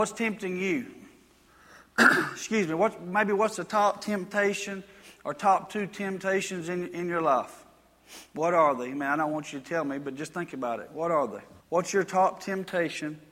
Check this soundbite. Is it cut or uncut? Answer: cut